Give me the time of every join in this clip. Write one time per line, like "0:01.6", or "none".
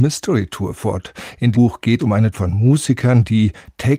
0:01.5
0:02.0
0:02.3